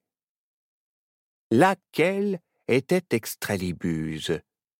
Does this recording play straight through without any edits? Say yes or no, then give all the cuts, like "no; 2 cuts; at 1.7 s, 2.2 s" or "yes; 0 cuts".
yes; 0 cuts